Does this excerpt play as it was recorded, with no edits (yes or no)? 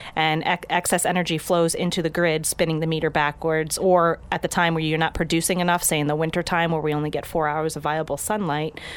yes